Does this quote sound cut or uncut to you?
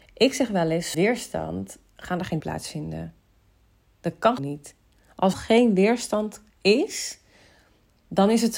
cut